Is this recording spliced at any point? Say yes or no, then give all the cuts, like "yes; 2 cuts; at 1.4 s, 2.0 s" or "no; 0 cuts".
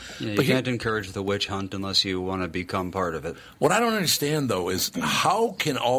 no; 0 cuts